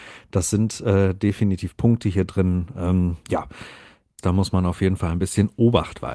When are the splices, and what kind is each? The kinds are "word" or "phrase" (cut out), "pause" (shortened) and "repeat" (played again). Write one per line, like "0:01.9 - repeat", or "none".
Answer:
none